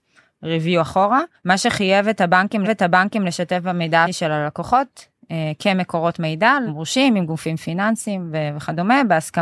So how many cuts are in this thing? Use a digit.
4